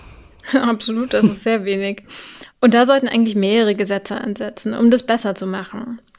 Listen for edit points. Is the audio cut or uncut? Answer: cut